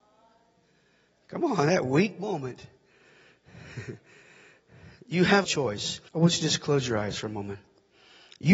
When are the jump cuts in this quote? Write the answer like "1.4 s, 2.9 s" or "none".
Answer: 5.4 s, 6.1 s